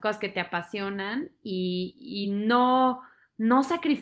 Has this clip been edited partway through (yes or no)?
no